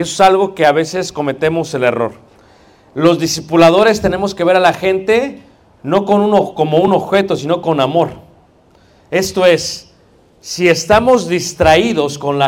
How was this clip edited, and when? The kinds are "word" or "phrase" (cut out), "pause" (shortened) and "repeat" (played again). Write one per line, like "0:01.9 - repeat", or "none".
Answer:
none